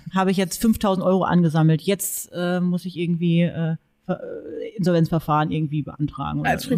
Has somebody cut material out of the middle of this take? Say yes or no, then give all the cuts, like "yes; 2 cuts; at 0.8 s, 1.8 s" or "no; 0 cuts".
no; 0 cuts